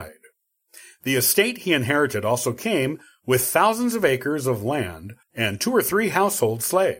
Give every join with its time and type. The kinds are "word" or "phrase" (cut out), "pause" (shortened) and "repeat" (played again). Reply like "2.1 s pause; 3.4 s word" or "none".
5.2 s pause